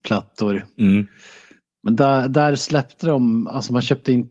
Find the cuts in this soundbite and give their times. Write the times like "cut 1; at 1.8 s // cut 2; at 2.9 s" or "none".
none